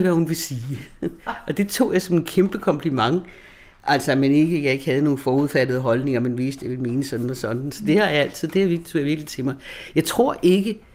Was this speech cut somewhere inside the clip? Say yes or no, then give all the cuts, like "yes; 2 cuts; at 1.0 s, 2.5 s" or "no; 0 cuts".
no; 0 cuts